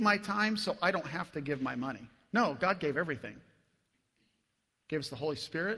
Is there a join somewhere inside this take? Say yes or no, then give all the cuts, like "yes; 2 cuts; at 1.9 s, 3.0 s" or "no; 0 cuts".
no; 0 cuts